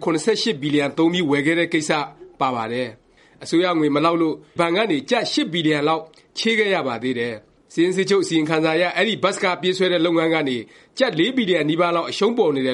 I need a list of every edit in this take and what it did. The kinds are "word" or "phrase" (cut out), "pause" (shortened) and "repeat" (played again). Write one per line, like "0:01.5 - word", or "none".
0:04.6 - word